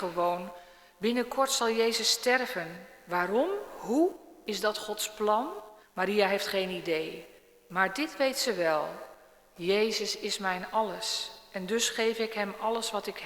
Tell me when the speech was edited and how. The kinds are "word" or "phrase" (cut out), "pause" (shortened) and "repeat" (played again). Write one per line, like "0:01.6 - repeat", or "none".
0:05.8 - pause